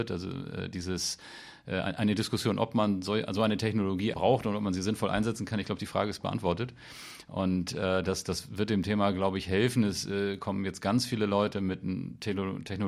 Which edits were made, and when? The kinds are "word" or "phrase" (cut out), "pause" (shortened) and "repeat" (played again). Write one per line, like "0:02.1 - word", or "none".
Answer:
0:04.1 - word